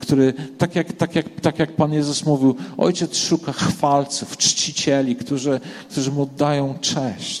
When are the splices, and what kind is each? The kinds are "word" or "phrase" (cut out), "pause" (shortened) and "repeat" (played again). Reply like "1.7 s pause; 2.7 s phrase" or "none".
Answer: none